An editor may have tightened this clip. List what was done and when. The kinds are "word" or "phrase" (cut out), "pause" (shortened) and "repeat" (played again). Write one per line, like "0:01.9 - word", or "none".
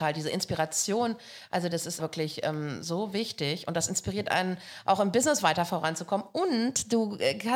0:02.0 - word